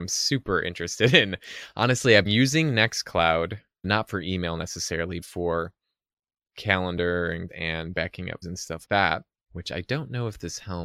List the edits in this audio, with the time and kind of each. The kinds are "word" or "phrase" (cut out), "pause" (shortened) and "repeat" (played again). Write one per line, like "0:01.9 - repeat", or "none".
0:02.3 - word
0:03.8 - word
0:05.2 - word
0:07.5 - word
0:08.4 - word
0:08.8 - word